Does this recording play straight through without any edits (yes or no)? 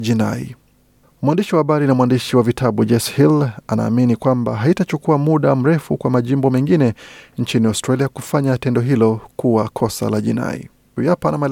yes